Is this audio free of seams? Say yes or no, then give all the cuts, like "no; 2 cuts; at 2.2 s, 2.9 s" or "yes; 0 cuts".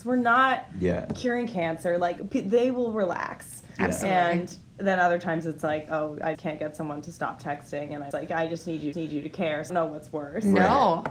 no; 4 cuts; at 6.3 s, 8.1 s, 8.9 s, 9.7 s